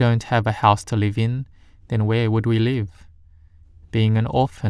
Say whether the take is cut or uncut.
uncut